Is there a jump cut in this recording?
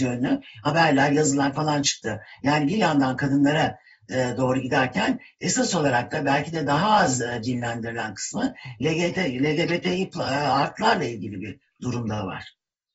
no; 0 cuts

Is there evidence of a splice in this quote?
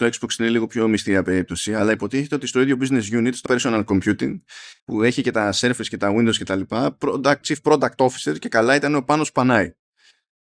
yes; 3 cuts; at 3.5 s, 4.8 s, 7.4 s

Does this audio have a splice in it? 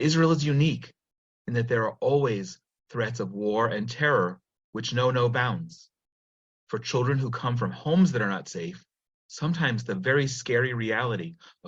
no; 0 cuts

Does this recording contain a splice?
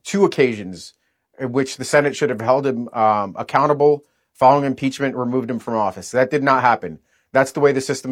no; 0 cuts

